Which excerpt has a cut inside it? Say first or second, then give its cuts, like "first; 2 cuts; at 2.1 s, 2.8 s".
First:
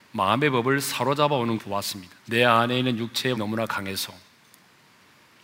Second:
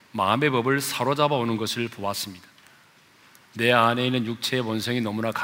first; 3 cuts; at 1.6 s, 2.2 s, 3.4 s